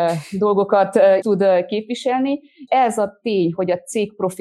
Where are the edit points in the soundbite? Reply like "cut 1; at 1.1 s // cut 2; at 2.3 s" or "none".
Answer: cut 1; at 1.2 s // cut 2; at 2.7 s